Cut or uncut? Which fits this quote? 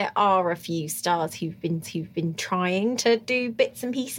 cut